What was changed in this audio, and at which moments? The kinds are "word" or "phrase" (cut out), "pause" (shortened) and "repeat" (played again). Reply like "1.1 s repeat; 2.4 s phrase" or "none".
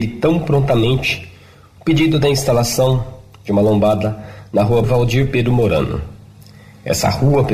4.8 s word